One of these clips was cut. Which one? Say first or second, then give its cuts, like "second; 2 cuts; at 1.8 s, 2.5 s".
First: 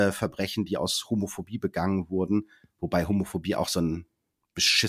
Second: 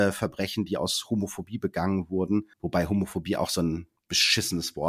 second; 2 cuts; at 2.5 s, 4.0 s